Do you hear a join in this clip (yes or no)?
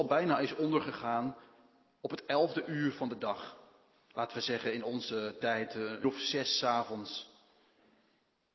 yes